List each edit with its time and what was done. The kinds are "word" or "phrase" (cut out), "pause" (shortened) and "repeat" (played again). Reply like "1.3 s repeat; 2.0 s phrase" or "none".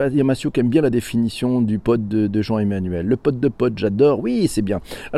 none